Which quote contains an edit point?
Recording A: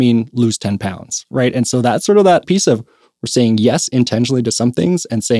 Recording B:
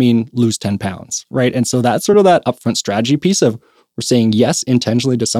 A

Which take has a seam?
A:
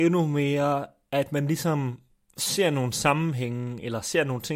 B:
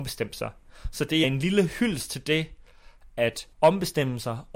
B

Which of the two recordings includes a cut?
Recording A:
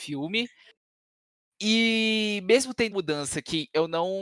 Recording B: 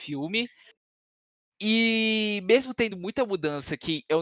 A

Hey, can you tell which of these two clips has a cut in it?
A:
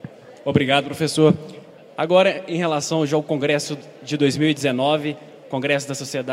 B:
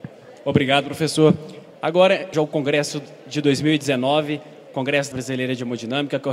B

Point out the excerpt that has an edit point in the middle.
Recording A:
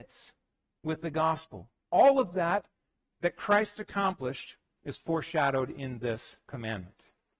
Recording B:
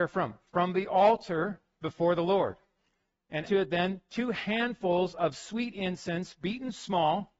B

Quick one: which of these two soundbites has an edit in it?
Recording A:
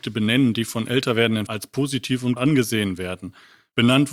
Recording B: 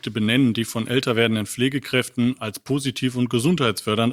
A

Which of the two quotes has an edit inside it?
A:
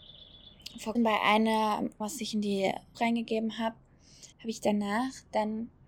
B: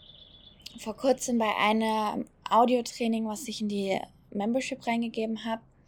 A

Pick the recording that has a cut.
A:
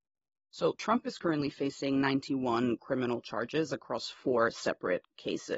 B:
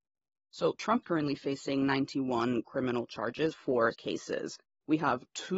B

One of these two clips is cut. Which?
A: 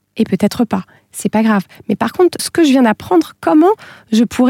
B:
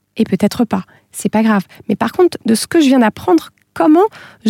A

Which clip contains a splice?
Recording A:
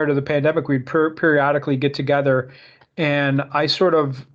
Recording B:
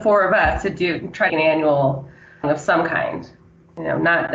B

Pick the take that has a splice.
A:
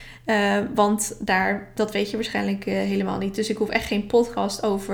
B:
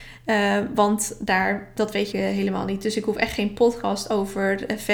B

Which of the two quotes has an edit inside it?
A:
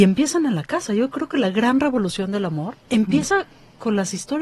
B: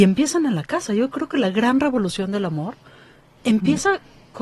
A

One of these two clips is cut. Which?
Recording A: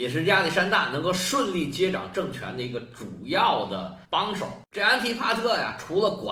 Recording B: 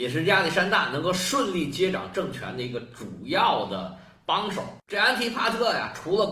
A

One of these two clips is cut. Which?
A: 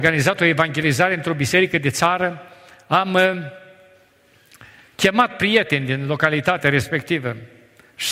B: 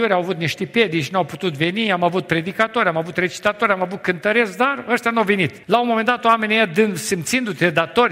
B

